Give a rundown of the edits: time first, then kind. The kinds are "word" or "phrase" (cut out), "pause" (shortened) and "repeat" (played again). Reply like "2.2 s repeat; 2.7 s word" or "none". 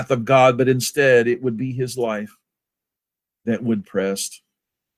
3.8 s word